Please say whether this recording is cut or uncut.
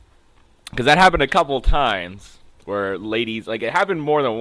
uncut